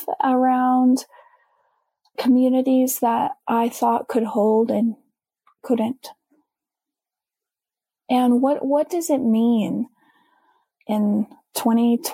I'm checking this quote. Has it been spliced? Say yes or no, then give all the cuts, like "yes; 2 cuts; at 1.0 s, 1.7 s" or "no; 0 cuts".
no; 0 cuts